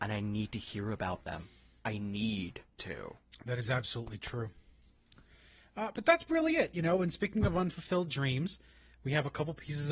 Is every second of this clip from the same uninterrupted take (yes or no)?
yes